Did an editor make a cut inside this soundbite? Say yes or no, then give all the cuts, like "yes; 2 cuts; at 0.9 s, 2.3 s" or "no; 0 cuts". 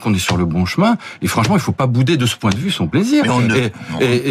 no; 0 cuts